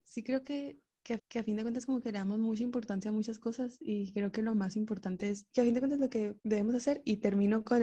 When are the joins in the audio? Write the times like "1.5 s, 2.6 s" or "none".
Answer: 1.2 s, 6.4 s